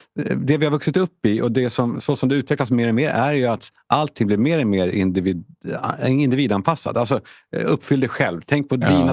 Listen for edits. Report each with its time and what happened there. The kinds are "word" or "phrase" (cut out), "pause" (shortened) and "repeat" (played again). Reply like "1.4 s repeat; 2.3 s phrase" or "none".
none

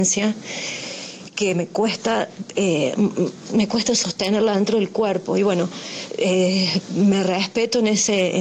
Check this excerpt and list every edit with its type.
none

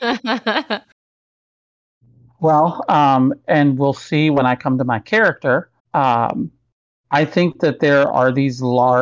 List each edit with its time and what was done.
5.8 s pause

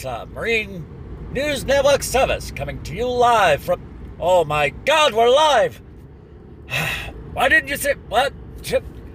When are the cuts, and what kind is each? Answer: none

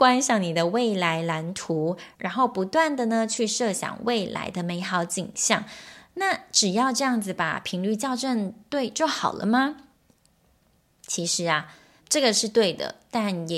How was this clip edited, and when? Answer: 12.0 s word

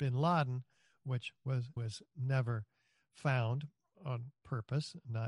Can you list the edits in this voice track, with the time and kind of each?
1.8 s word; 3.9 s word

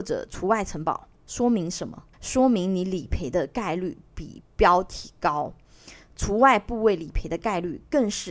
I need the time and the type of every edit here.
1.2 s pause; 2.1 s pause

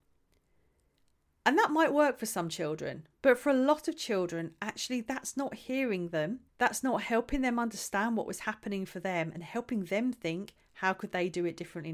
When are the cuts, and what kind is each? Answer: 6.5 s pause

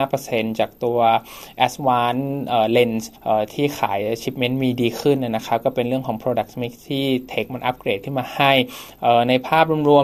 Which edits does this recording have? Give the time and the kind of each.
3.2 s pause

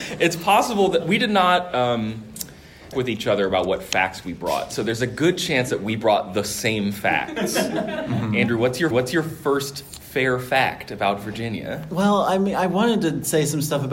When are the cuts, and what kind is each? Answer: 2.9 s phrase; 8.9 s repeat

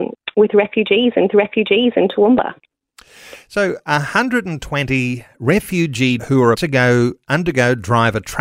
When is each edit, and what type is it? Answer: 1.3 s repeat; 6.2 s word; 6.5 s word

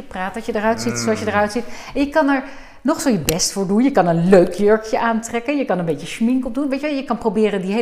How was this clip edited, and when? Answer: none

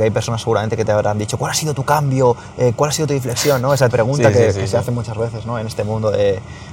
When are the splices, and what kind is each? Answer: 3.1 s phrase; 3.9 s word

